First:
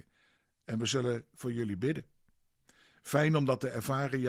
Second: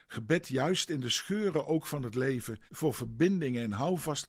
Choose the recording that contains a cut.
second; 1 cut; at 2.7 s

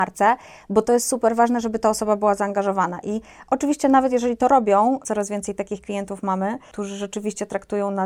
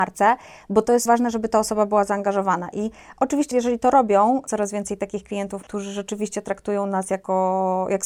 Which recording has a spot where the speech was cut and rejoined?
second; 3 cuts; at 1.1 s, 3.5 s, 5.6 s

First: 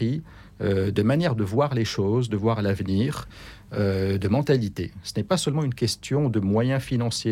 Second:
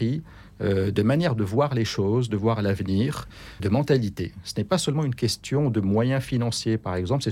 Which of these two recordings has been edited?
second; 1 cut; at 3.6 s

